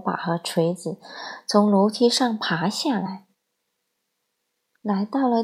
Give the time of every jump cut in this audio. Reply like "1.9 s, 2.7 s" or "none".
none